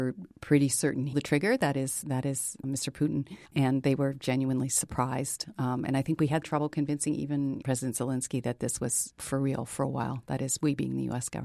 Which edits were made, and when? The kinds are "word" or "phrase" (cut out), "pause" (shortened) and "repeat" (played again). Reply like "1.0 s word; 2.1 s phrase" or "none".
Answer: 1.1 s phrase; 2.0 s word; 2.6 s word; 3.5 s pause; 6.4 s word; 7.6 s word